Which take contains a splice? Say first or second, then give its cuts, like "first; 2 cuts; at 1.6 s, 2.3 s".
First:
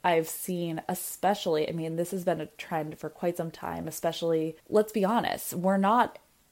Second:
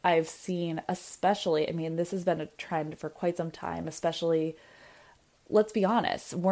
first; 1 cut; at 4.6 s